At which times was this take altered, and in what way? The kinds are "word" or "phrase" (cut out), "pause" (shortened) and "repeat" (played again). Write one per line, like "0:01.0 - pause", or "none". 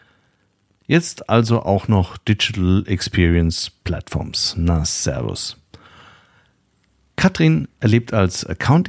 none